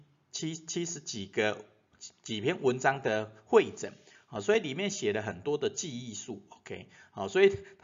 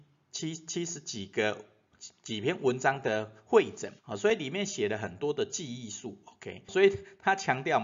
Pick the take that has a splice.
second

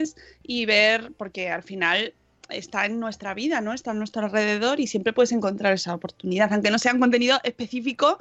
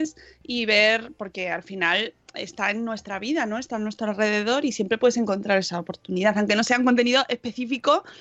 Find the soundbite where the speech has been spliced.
second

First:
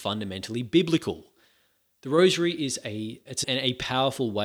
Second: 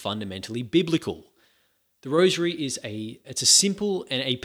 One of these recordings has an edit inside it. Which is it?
first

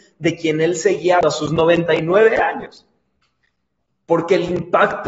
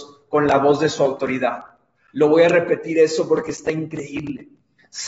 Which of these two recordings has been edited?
first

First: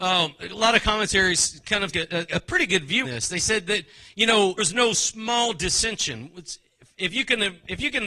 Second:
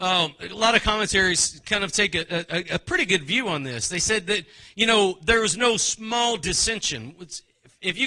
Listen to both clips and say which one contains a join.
first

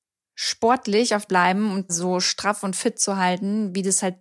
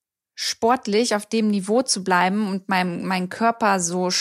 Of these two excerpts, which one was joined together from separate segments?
first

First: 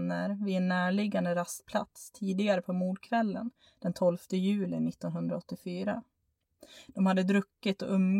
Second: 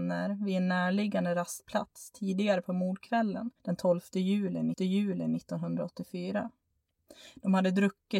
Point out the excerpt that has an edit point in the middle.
second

